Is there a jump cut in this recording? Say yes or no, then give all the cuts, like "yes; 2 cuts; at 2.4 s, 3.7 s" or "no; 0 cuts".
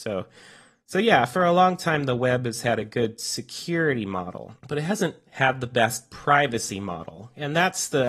yes; 1 cut; at 4.6 s